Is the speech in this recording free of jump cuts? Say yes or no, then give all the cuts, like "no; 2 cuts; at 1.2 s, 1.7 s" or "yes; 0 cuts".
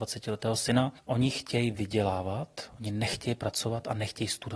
yes; 0 cuts